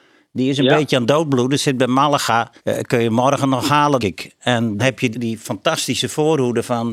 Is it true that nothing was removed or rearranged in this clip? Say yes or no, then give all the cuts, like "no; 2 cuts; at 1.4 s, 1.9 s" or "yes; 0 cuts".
no; 4 cuts; at 2.6 s, 4.0 s, 4.8 s, 5.1 s